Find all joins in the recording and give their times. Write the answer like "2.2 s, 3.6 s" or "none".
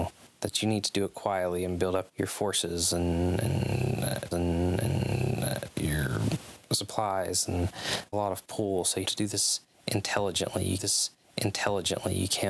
2.1 s, 4.3 s, 8.1 s, 9.0 s, 10.8 s